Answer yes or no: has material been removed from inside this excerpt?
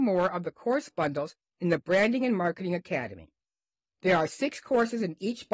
no